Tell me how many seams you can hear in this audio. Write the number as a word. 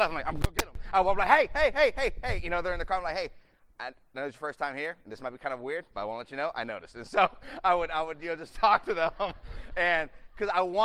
zero